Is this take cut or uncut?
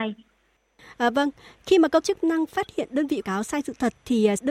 cut